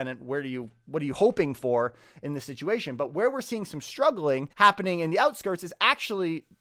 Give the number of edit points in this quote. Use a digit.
1